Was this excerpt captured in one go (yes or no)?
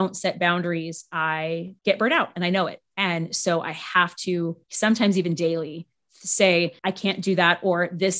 no